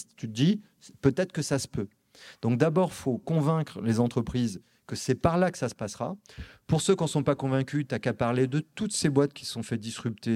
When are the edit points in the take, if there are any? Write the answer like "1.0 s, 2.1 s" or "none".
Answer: none